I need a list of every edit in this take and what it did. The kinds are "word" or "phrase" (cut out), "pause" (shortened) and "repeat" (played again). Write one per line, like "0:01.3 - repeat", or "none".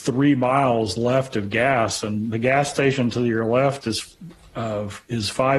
none